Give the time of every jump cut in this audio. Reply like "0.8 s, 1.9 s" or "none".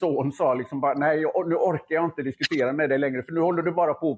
none